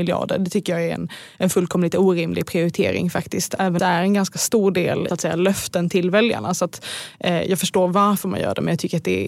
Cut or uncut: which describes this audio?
cut